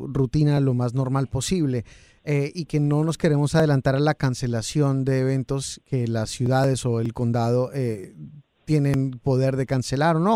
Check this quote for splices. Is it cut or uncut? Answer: uncut